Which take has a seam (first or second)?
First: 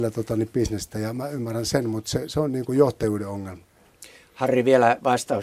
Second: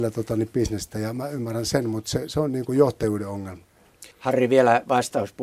second